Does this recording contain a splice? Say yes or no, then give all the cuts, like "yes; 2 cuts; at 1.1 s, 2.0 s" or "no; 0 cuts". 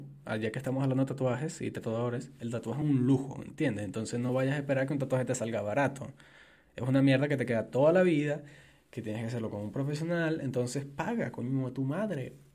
no; 0 cuts